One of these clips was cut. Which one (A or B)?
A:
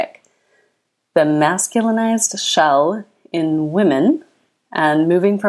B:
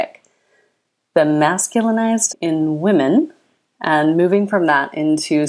B